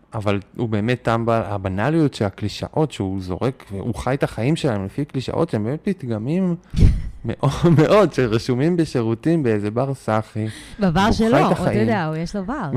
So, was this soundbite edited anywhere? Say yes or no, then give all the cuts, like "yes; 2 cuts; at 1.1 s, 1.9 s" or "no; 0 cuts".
no; 0 cuts